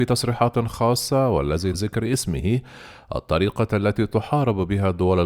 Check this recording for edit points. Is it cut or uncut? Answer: cut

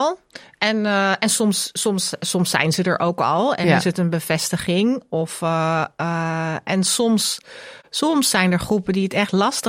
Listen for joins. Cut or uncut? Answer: uncut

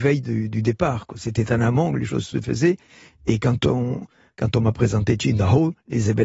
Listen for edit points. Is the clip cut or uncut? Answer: uncut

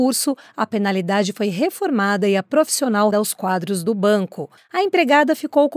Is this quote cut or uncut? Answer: cut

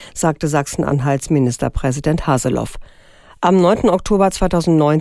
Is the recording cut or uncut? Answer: uncut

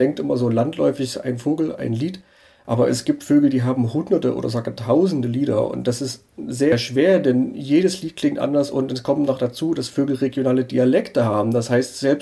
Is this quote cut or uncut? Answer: uncut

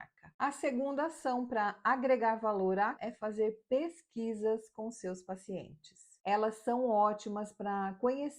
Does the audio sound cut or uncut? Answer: cut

